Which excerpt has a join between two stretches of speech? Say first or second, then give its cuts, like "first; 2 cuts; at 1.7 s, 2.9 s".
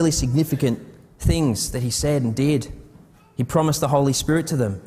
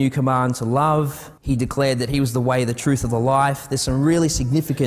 second; 1 cut; at 1.4 s